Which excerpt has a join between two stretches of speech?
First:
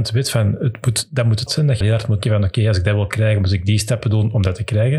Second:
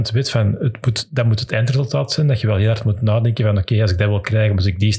first; 3 cuts; at 1.5 s, 1.8 s, 2.2 s

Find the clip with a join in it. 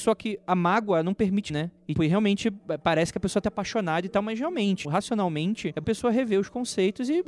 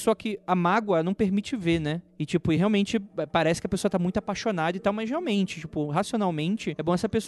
first; 5 cuts; at 1.5 s, 2.0 s, 3.4 s, 4.8 s, 5.8 s

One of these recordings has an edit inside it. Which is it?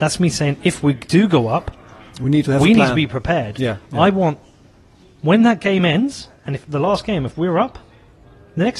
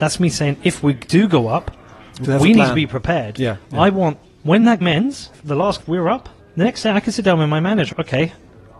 second; 7 cuts; at 2.2 s, 4.2 s, 4.8 s, 5.3 s, 5.8 s, 6.4 s, 7.9 s

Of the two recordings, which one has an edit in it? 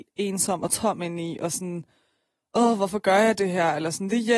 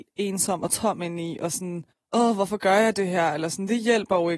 second; 1 cut; at 1.9 s

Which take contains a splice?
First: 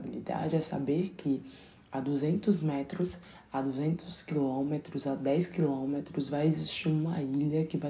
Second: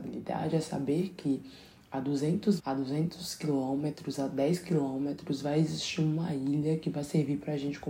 second; 1 cut; at 2.6 s

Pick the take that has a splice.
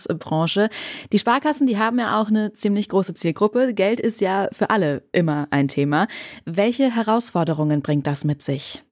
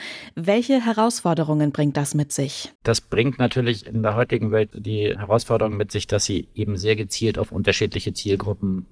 second; 1 cut; at 2.8 s

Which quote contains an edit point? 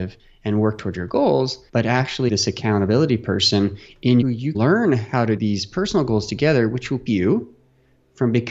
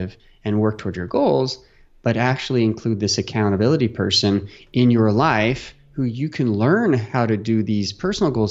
first; 6 cuts; at 1.7 s, 2.3 s, 4.2 s, 4.5 s, 5.4 s, 7.1 s

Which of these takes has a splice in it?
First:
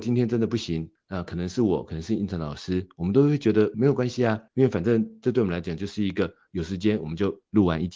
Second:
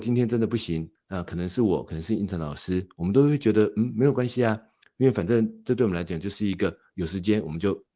first; 2 cuts; at 3.7 s, 4.5 s

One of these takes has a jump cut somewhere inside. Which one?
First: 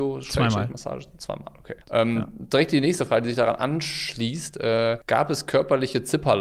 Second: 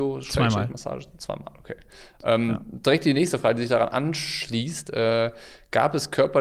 first; 2 cuts; at 1.8 s, 5.0 s

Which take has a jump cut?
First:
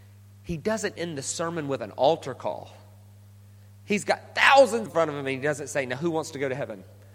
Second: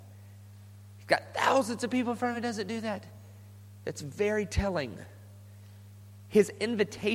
first; 2 cuts; at 1.0 s, 4.9 s

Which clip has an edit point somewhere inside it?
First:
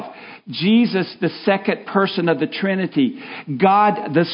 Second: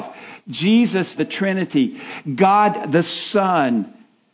second; 1 cut; at 1.2 s

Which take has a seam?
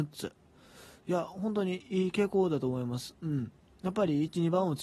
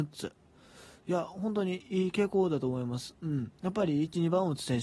second; 1 cut; at 3.6 s

